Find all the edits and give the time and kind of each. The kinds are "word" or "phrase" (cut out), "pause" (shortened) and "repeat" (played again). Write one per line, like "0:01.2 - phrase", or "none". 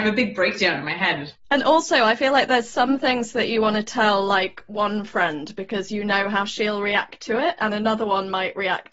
0:01.4 - pause